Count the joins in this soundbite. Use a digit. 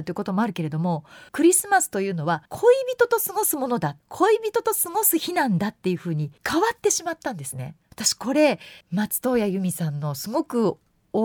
6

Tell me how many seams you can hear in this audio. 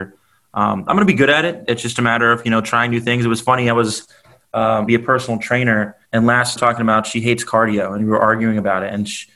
3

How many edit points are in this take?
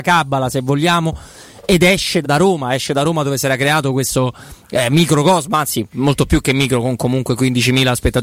2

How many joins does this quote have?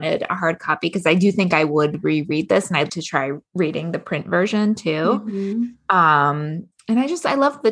1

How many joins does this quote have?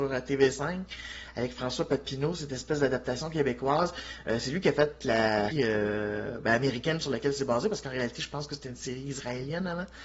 1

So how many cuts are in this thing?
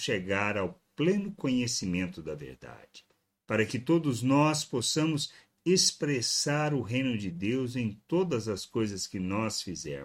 0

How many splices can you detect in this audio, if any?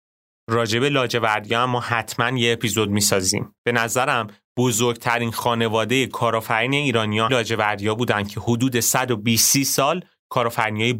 2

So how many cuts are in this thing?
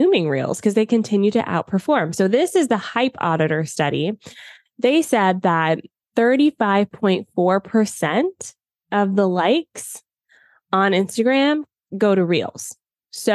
0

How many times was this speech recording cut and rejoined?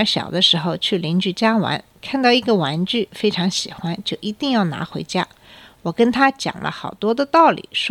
0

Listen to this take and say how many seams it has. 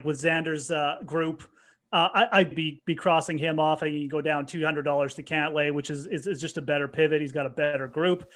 1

